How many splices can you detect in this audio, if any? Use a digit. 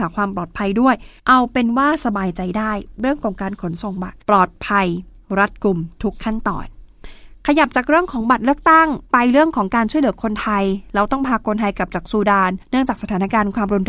4